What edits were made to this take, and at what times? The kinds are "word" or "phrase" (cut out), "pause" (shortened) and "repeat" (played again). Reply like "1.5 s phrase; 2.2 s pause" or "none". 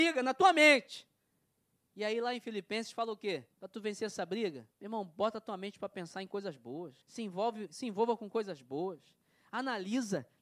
3.5 s pause; 4.7 s pause; 7.0 s pause

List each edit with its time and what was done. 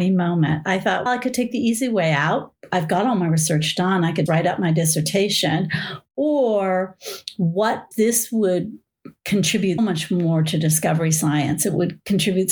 1.1 s word; 4.3 s word; 7.9 s word; 9.8 s word

